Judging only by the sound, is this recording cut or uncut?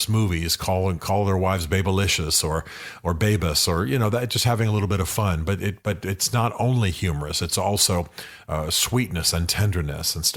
uncut